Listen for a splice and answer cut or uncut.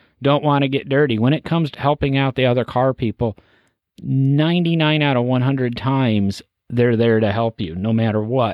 cut